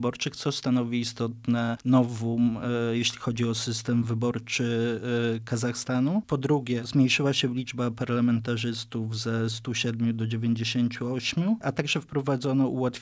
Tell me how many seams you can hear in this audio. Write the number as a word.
zero